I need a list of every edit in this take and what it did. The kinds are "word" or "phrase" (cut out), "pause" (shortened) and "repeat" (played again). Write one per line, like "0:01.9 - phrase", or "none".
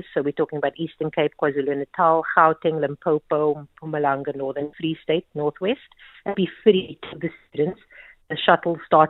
0:04.7 - word
0:06.3 - phrase